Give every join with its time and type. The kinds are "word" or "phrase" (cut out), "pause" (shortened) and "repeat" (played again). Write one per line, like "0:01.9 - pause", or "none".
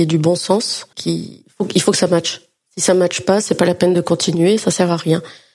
0:00.9 - word